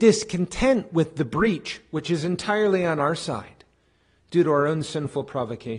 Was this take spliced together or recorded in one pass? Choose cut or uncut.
uncut